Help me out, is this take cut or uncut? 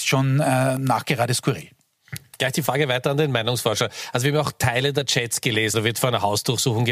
cut